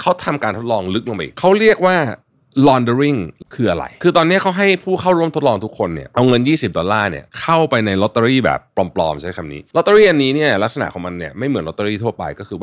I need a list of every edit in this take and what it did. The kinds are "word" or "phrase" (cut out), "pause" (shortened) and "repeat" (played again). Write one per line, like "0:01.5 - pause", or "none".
0:03.4 - word